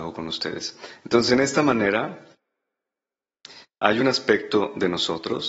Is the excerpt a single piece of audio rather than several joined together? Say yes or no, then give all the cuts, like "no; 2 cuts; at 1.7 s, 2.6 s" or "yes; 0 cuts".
yes; 0 cuts